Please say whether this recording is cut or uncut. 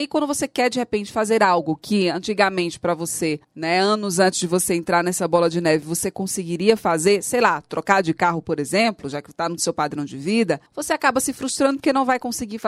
cut